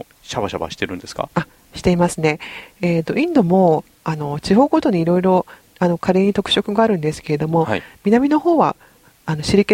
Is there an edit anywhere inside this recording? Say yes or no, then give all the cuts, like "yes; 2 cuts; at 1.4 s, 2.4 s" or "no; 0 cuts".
no; 0 cuts